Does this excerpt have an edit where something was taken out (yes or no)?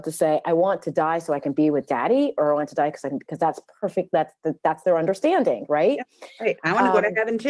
no